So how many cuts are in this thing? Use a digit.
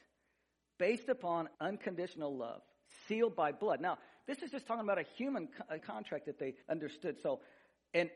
3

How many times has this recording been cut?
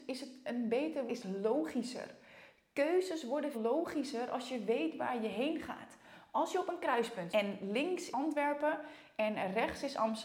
4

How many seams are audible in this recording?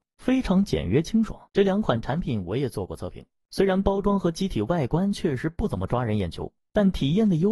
1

